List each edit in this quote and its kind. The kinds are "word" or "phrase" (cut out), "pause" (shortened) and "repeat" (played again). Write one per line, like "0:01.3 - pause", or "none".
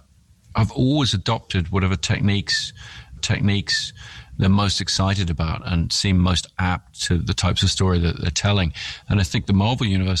0:03.2 - repeat
0:07.2 - word